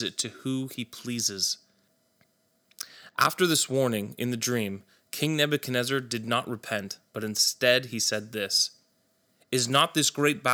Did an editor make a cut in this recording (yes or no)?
no